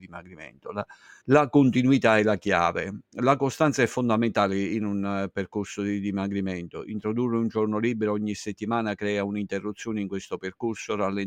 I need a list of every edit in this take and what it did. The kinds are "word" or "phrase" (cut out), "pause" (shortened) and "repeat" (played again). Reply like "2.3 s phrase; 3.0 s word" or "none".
1.2 s pause